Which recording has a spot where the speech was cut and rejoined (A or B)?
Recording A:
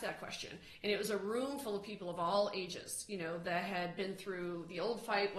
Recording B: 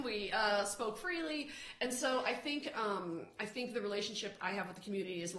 B